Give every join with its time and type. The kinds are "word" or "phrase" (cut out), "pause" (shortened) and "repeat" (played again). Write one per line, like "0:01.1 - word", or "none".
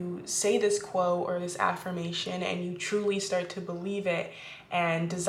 none